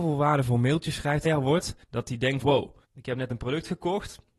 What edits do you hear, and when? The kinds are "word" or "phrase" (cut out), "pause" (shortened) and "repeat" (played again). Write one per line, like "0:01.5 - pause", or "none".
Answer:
0:01.2 - phrase
0:01.8 - pause
0:02.4 - word
0:02.8 - pause